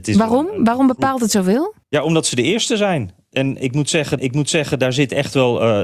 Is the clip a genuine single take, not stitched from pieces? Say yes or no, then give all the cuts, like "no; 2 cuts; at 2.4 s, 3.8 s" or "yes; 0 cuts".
no; 2 cuts; at 1.8 s, 4.2 s